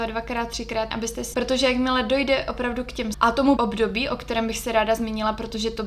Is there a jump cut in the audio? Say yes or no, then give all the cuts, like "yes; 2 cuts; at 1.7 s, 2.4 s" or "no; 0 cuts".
yes; 4 cuts; at 0.9 s, 1.3 s, 3.1 s, 3.6 s